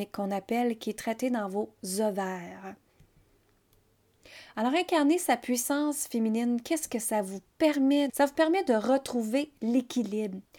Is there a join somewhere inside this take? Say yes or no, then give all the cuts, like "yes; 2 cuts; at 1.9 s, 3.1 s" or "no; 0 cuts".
yes; 1 cut; at 8.1 s